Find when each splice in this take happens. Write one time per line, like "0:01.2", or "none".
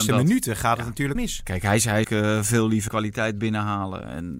0:01.2
0:02.0
0:02.9